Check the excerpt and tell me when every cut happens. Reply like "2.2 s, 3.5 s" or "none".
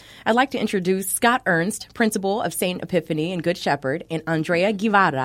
none

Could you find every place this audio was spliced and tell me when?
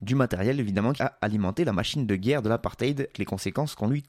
1.0 s, 3.1 s

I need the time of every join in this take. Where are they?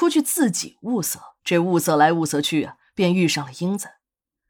1.4 s

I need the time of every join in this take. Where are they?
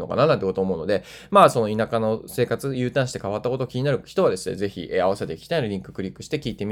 none

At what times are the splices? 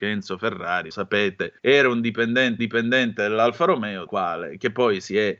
0.9 s, 1.6 s, 2.6 s, 4.1 s

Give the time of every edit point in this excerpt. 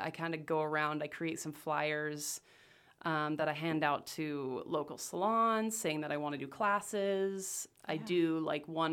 none

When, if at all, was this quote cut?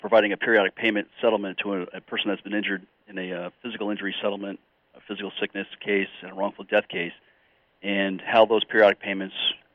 none

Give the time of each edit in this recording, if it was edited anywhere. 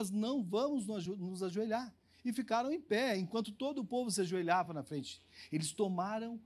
none

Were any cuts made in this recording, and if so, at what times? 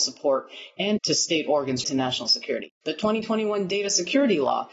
1.0 s, 1.8 s

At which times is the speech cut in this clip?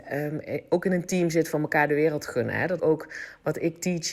2.8 s

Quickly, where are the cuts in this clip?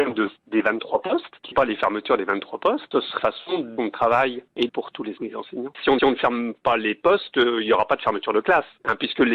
1.5 s, 3.2 s, 3.8 s, 4.7 s, 5.2 s, 6.0 s

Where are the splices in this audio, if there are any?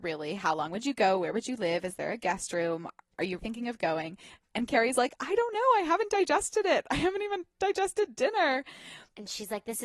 3.4 s

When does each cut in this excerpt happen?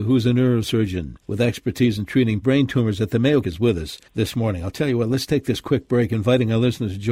1.2 s, 2.4 s, 3.4 s, 4.1 s

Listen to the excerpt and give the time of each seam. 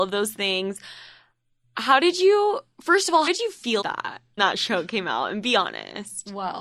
3.3 s, 3.8 s, 4.4 s

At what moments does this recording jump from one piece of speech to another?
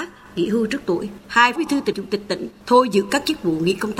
1.6 s, 1.9 s

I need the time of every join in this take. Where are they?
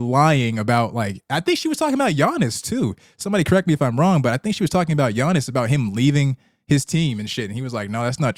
none

